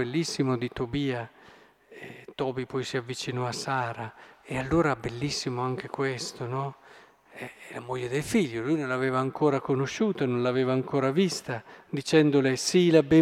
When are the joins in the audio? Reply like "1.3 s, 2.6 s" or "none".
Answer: none